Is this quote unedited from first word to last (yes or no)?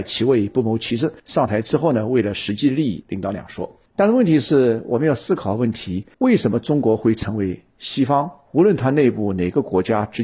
no